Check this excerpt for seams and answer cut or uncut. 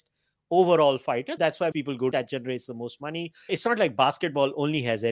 cut